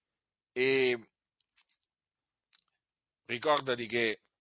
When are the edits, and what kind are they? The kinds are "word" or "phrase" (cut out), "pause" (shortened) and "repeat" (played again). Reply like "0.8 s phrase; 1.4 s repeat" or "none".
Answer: none